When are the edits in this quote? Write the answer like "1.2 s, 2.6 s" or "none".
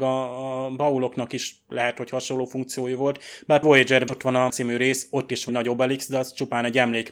3.6 s, 4.1 s, 4.5 s, 5.5 s